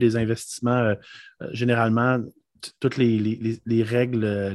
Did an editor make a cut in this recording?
no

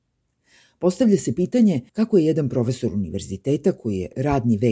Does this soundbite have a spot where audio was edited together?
yes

